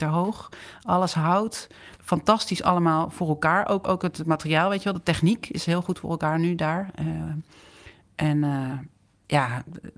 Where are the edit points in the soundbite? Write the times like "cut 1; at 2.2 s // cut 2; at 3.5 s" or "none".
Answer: cut 1; at 1.9 s // cut 2; at 3.8 s